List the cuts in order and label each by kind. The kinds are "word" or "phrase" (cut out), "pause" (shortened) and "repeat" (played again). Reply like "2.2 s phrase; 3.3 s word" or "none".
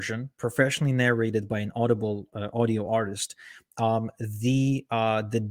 none